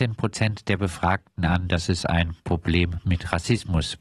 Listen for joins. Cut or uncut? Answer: uncut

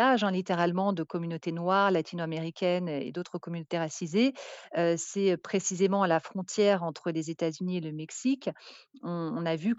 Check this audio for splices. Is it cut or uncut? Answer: uncut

